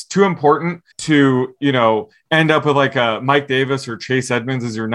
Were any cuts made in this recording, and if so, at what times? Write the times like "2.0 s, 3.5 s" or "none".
0.9 s